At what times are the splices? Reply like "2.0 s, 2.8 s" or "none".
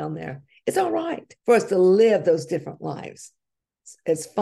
1.4 s